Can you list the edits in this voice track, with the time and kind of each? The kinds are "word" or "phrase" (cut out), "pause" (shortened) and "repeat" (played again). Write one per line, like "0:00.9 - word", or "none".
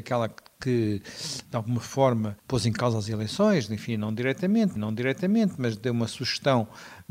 0:01.4 - word
0:02.4 - pause
0:04.8 - repeat